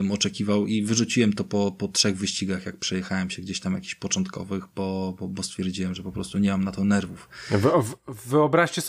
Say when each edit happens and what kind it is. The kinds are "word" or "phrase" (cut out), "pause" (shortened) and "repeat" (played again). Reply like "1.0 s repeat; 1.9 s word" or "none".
none